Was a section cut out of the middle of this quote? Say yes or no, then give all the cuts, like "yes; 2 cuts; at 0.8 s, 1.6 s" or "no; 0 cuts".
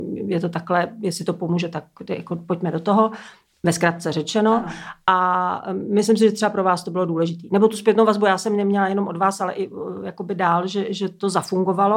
no; 0 cuts